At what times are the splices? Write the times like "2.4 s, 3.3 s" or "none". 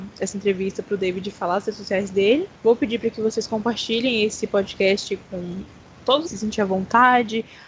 2.5 s, 6.3 s